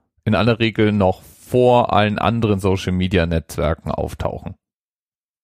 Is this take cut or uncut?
uncut